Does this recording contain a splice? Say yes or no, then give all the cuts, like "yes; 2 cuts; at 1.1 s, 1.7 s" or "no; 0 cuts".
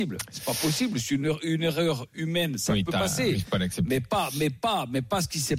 no; 0 cuts